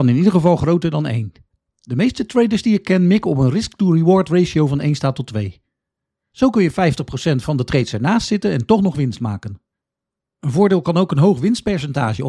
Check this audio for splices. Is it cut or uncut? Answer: uncut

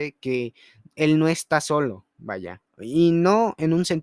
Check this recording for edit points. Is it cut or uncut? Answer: uncut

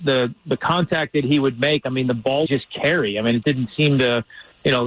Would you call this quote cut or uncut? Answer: cut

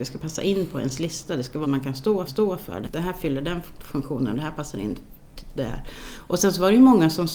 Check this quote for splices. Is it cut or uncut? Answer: cut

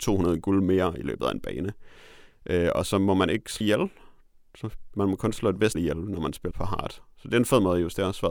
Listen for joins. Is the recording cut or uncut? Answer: cut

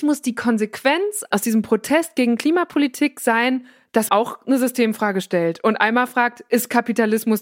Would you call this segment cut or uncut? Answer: cut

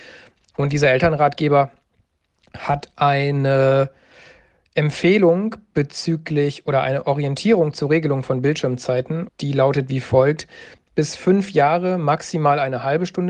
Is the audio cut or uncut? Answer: cut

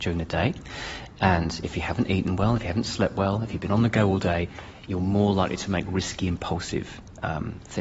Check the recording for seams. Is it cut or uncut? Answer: uncut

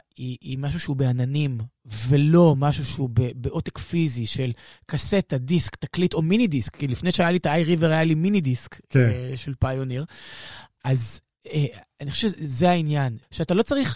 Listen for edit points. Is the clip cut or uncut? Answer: uncut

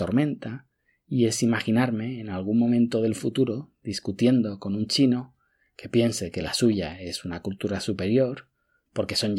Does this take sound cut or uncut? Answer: uncut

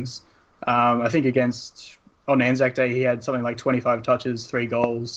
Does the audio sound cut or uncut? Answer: uncut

